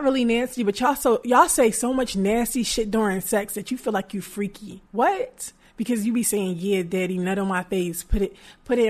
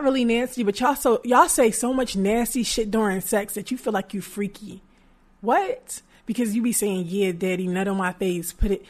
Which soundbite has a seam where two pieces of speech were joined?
first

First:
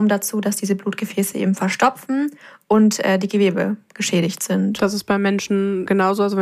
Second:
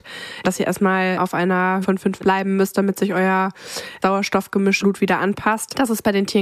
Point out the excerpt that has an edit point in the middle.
second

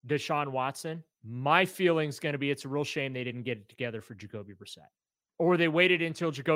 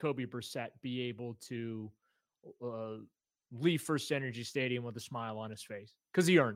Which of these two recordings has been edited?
first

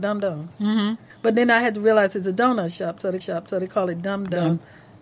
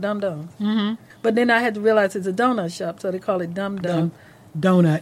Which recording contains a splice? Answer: first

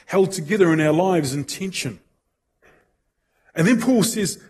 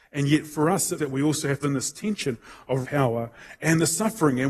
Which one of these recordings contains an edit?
second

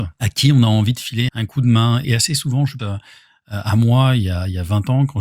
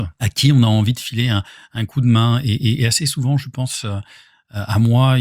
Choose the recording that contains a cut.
first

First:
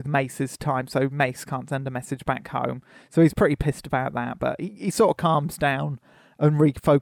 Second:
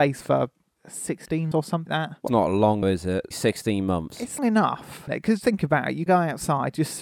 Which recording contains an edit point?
second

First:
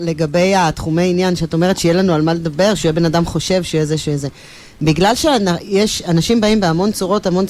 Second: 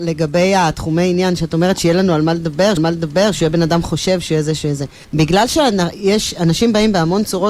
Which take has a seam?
second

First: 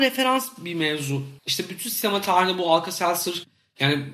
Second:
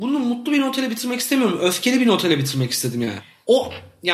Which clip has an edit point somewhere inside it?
first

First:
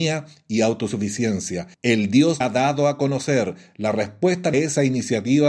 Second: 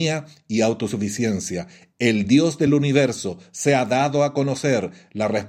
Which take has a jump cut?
first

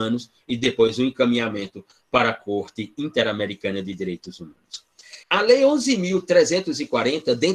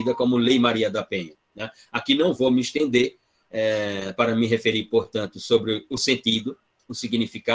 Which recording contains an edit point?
first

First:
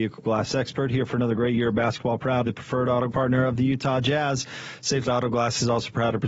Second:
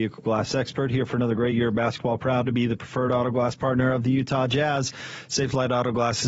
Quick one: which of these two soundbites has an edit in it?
first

